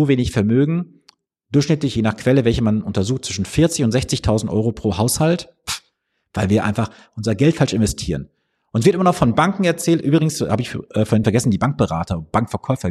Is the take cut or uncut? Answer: uncut